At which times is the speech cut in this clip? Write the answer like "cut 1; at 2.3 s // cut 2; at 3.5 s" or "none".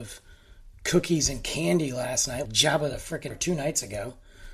cut 1; at 2.5 s // cut 2; at 3.3 s

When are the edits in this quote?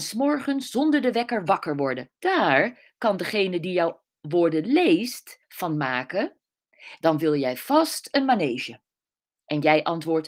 cut 1; at 2.2 s // cut 2; at 5.4 s

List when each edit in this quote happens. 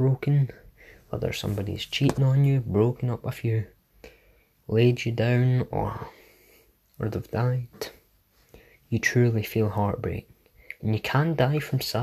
none

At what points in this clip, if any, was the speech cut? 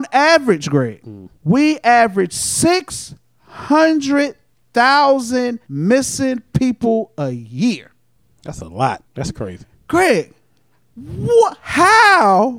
cut 1; at 1.4 s // cut 2; at 5.6 s // cut 3; at 9.1 s

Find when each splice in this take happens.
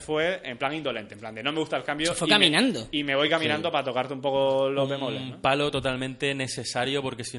none

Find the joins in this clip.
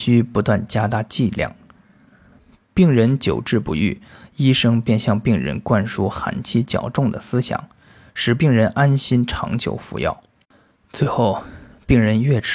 none

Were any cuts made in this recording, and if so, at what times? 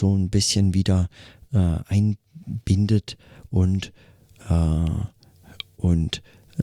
none

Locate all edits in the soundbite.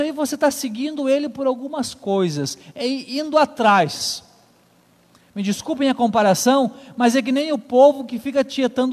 none

